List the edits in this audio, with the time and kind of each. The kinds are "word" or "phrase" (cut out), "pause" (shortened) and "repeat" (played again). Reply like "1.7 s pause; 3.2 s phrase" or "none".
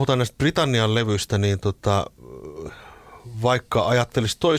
none